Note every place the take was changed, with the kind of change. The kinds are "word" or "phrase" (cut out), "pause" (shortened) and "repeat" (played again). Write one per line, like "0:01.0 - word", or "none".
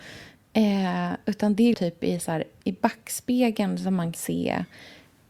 0:01.7 - word
0:02.6 - word
0:04.1 - word